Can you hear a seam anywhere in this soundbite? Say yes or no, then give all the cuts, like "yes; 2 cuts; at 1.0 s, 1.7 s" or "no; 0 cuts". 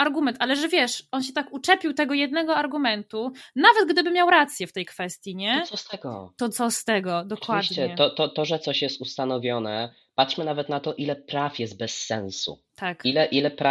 no; 0 cuts